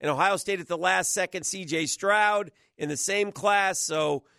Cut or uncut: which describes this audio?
cut